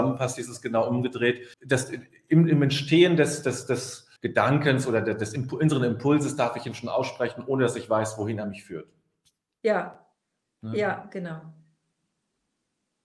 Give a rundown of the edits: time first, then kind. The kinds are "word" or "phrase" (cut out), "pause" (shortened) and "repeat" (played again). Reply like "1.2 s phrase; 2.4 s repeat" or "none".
1.5 s pause; 4.2 s pause; 10.4 s pause